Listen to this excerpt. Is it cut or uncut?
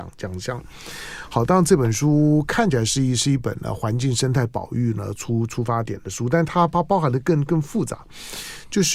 uncut